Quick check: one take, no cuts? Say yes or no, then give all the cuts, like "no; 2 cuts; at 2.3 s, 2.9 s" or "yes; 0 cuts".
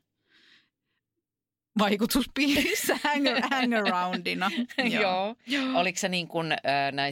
yes; 0 cuts